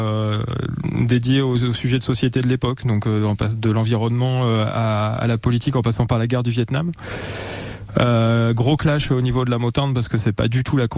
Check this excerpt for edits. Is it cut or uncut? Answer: uncut